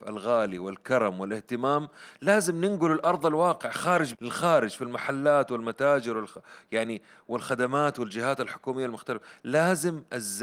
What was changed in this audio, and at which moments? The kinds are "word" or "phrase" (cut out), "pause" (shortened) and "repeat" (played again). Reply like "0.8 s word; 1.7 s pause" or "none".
4.1 s word